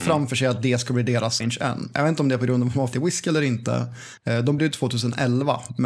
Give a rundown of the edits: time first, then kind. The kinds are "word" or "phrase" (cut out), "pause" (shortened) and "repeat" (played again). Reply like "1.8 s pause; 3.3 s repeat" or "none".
1.4 s word; 2.9 s word; 4.2 s pause; 4.6 s word